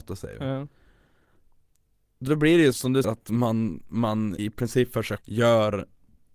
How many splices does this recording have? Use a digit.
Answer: 5